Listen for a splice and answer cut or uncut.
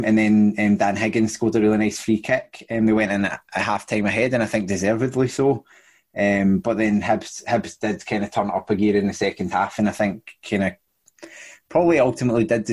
uncut